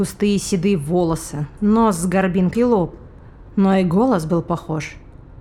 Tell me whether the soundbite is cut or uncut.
cut